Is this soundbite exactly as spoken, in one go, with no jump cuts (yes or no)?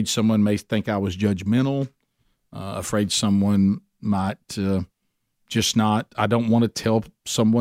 yes